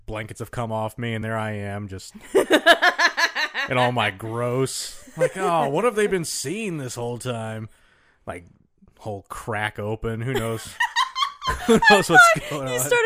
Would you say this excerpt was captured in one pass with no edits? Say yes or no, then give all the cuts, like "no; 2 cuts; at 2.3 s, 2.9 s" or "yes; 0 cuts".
yes; 0 cuts